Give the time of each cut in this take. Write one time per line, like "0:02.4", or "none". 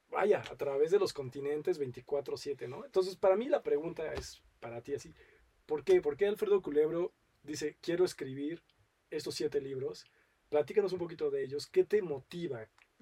none